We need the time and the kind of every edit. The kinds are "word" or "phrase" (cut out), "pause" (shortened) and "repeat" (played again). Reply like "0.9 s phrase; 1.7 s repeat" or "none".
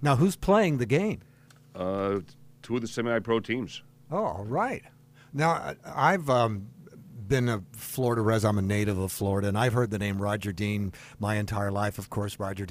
none